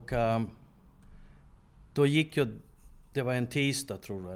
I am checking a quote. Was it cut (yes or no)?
no